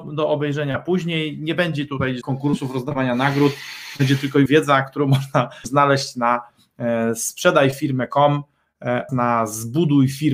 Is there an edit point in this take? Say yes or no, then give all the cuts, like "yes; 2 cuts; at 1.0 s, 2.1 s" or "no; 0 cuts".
yes; 4 cuts; at 2.2 s, 4.5 s, 5.6 s, 9.1 s